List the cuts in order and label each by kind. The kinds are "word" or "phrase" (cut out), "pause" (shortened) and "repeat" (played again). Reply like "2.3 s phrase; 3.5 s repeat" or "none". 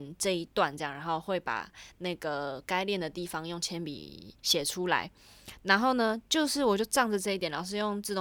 4.4 s pause

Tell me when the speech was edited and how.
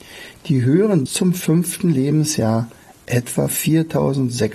1.1 s word

